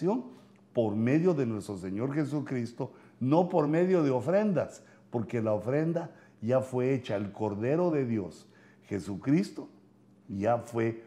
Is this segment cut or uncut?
uncut